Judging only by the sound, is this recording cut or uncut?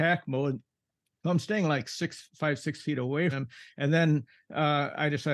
cut